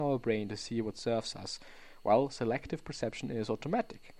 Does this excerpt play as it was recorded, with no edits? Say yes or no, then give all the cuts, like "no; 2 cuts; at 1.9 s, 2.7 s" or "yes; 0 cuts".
yes; 0 cuts